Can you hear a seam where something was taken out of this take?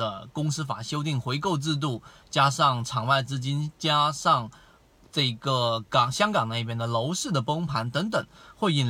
no; 0 cuts

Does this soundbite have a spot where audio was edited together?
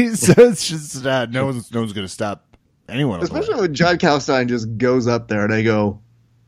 no; 0 cuts

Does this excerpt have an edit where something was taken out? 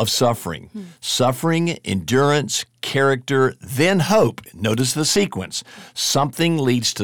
no; 0 cuts

